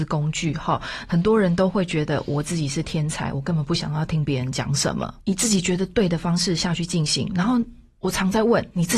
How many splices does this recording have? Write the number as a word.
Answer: one